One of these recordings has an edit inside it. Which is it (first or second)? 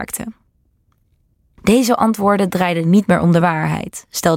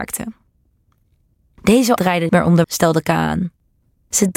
second